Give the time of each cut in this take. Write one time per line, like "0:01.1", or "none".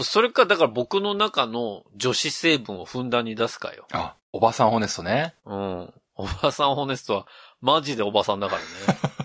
0:04.2